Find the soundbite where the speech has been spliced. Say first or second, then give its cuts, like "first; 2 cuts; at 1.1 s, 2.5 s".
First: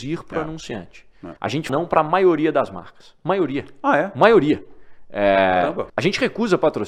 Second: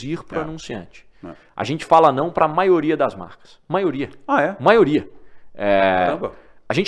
first; 3 cuts; at 1.4 s, 1.7 s, 5.9 s